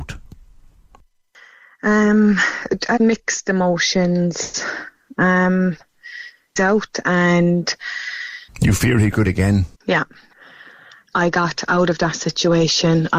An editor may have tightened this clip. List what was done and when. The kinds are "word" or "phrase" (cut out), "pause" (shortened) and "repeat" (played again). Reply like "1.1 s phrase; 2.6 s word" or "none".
3.0 s phrase; 6.6 s phrase; 8.5 s pause; 9.2 s word; 9.7 s pause